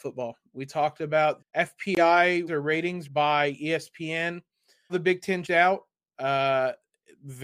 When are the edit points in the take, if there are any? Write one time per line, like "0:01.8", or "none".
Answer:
0:01.4
0:02.5
0:03.0
0:04.9
0:05.4